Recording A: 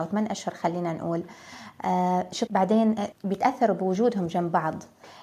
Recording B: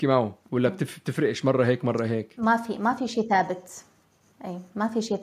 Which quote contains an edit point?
A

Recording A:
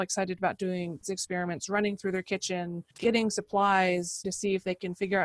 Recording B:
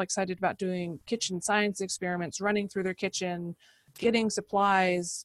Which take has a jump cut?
A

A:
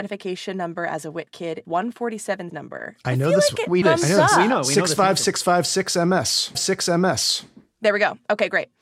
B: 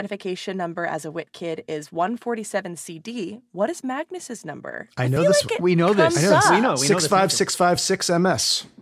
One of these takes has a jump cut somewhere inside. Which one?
A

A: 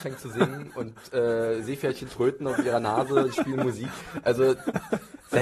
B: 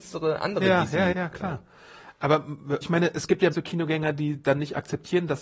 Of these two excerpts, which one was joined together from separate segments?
B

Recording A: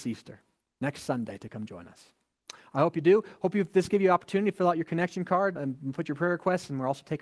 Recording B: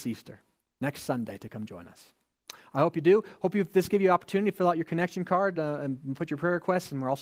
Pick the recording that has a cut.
A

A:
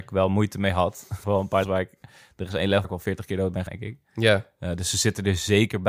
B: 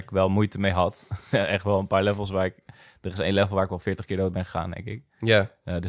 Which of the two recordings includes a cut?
A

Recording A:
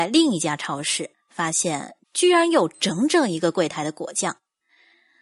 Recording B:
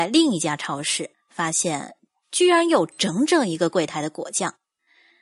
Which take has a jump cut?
A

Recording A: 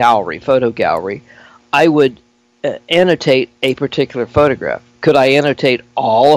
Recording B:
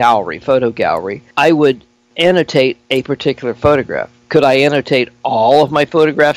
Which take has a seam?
B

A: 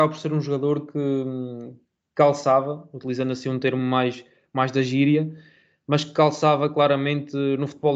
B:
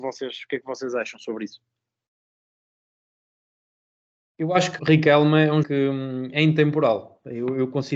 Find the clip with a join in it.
B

